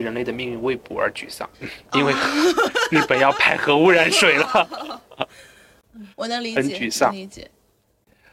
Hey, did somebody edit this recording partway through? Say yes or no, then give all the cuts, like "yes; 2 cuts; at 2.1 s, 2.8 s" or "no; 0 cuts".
yes; 2 cuts; at 1.5 s, 6.1 s